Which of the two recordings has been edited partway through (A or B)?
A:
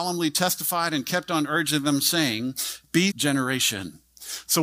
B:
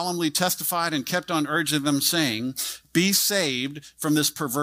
A